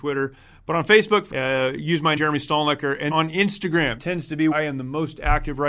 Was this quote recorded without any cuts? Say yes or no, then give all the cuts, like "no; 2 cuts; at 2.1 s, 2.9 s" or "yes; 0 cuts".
no; 5 cuts; at 1.3 s, 2.2 s, 3.1 s, 4.0 s, 4.5 s